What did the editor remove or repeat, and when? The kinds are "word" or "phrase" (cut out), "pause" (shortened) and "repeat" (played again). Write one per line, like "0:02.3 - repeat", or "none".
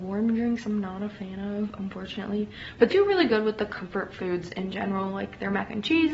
0:02.9 - word